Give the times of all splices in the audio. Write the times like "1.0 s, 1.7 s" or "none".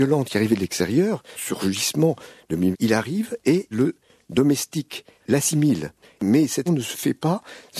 1.3 s, 2.7 s, 3.7 s, 5.2 s, 6.7 s